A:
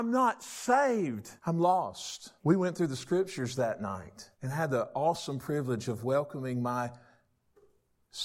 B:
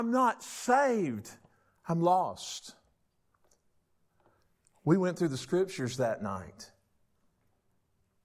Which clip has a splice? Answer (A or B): A